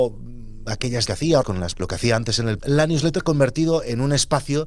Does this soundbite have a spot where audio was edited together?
yes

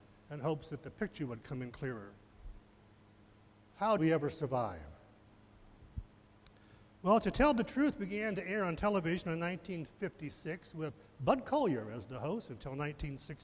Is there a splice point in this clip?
yes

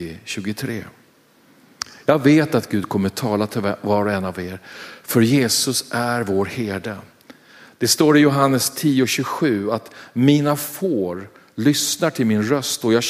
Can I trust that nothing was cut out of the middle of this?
yes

